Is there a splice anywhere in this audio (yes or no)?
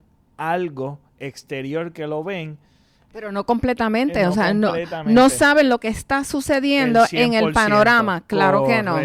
yes